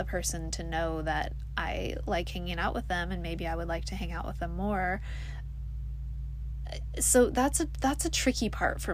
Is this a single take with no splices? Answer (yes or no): yes